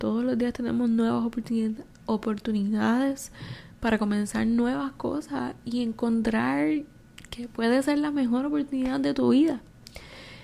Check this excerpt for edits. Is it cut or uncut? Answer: uncut